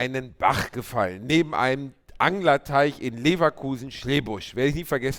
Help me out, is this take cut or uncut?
uncut